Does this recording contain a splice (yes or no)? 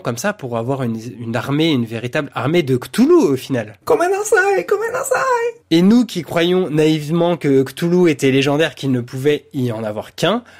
yes